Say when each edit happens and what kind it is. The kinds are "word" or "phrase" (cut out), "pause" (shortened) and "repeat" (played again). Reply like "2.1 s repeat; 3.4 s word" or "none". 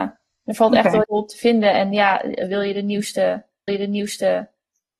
1.0 s word; 3.7 s repeat

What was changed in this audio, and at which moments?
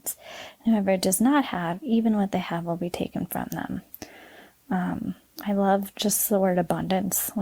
5.3 s pause

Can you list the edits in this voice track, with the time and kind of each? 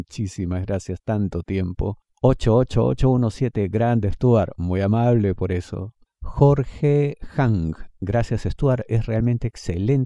none

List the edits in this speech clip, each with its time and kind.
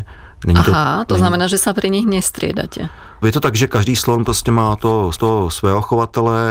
5.1 s repeat

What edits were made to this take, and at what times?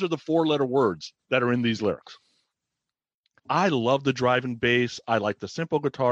1.2 s pause; 3.4 s word

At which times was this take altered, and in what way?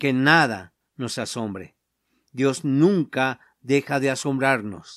none

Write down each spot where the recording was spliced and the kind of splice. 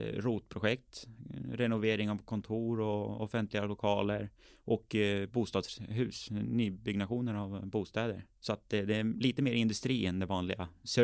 none

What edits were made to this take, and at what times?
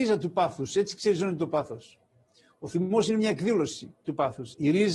none

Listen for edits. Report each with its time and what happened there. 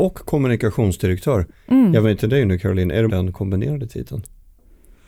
2.0 s word; 3.1 s phrase

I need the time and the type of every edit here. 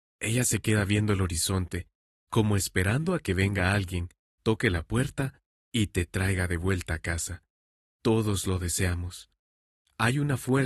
none

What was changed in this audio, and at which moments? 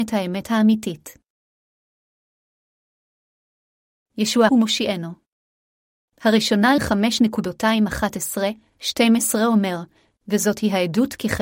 4.5 s phrase; 6.8 s word

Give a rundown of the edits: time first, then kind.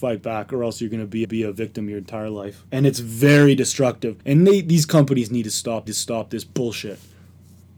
1.2 s repeat; 2.7 s pause; 4.2 s pause; 5.9 s repeat

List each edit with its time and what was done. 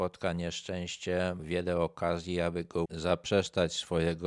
1.4 s word; 2.9 s word

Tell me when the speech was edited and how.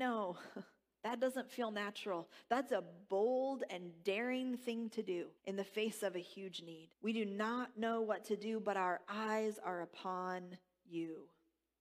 5.4 s pause; 6.9 s pause

